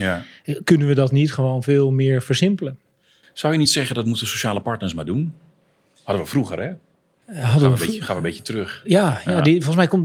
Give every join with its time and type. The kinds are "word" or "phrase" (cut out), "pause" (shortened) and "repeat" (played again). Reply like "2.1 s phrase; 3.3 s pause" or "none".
none